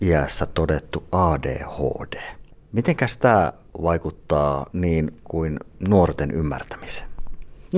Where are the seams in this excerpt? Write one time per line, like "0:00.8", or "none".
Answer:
0:05.2